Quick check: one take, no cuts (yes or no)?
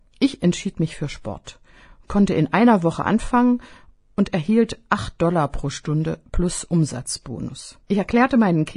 yes